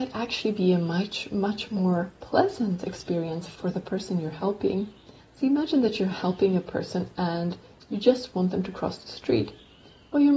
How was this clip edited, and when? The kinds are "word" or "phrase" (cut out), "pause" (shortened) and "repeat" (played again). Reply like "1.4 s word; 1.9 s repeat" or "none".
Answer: none